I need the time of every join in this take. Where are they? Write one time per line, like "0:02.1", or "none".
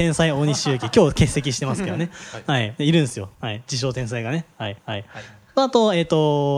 0:03.3
0:04.8